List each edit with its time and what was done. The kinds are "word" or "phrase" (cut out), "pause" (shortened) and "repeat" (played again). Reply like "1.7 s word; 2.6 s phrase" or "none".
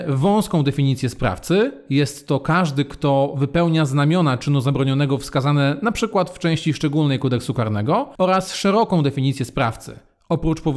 none